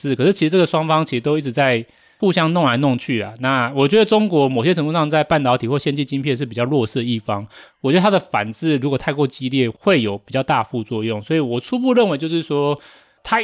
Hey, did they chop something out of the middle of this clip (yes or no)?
no